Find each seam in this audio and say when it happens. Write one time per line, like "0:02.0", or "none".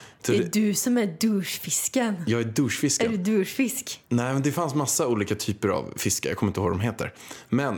0:04.1